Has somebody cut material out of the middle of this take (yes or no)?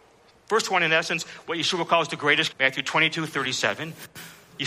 yes